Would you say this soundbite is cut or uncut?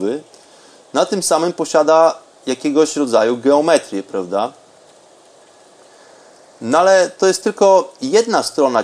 uncut